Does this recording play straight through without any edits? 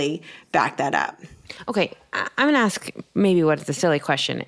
yes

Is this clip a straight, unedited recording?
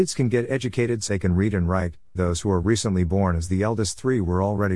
no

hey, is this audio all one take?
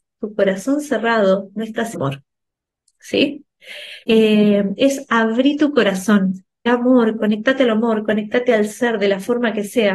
no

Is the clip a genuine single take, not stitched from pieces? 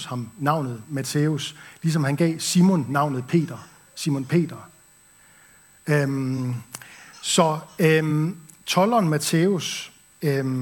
yes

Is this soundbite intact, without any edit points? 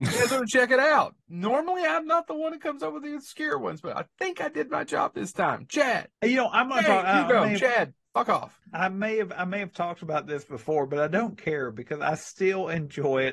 yes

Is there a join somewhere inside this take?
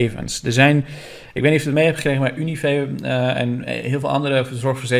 no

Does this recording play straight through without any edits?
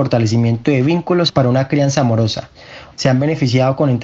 no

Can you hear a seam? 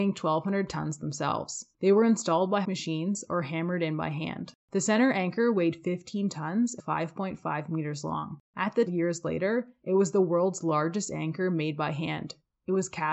yes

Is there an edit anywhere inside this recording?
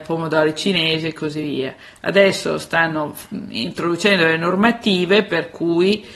no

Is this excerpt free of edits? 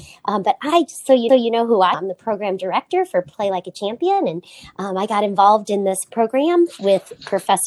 no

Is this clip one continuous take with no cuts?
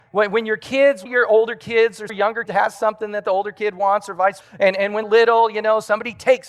no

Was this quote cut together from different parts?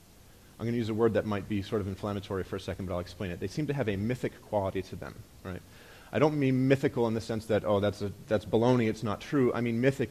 no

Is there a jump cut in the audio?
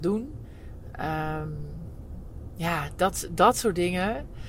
no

